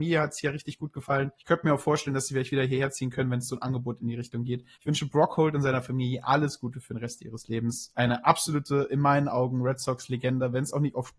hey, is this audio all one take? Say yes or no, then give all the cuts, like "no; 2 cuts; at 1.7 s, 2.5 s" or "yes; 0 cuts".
no; 2 cuts; at 1.4 s, 4.7 s